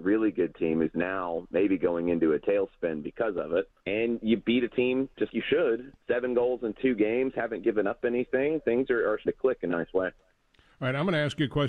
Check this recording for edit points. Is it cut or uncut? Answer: cut